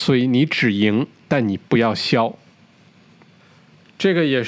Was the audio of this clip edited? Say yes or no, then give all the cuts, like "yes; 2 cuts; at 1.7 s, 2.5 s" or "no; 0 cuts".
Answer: no; 0 cuts